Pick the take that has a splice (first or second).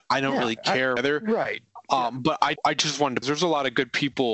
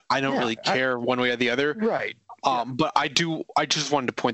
first